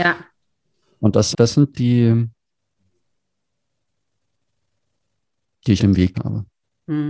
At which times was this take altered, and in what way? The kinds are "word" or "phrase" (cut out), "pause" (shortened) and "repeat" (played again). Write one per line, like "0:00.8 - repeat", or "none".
0:01.3 - word
0:01.7 - word
0:05.8 - word
0:06.1 - word